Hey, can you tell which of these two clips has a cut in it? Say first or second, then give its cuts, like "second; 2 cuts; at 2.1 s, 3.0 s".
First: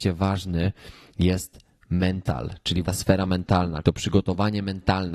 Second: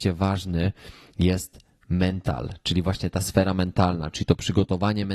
first; 2 cuts; at 2.8 s, 3.8 s